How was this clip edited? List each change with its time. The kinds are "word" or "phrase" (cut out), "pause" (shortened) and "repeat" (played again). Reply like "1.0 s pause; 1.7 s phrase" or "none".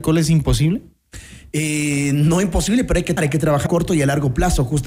3.2 s word; 3.7 s word